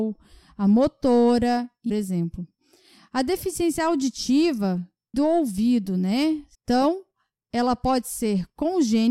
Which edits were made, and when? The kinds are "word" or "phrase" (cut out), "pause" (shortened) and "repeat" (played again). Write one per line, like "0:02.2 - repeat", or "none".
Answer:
0:01.9 - phrase
0:05.1 - word
0:06.5 - pause